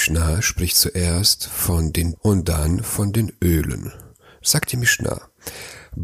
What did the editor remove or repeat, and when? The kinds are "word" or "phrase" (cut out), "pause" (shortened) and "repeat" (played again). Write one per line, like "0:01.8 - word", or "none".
0:02.2 - word